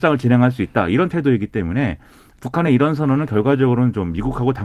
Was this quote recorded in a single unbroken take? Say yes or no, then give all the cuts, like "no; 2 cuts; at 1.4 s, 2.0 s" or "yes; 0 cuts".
yes; 0 cuts